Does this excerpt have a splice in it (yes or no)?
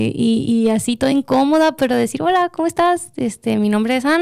no